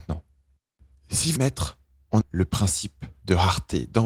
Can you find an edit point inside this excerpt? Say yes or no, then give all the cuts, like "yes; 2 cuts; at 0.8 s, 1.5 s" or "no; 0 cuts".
yes; 2 cuts; at 1.4 s, 2.2 s